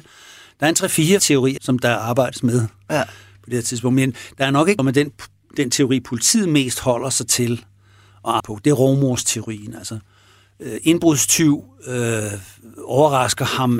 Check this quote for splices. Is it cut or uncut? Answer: cut